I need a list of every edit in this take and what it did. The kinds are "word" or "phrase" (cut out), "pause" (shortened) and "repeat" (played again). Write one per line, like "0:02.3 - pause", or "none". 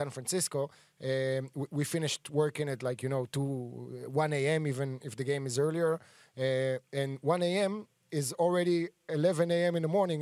none